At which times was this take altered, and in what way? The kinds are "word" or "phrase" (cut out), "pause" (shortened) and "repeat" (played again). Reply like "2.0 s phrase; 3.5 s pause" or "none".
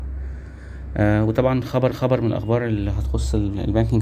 1.9 s repeat